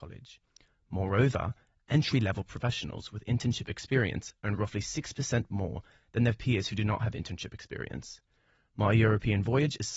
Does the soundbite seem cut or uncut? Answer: uncut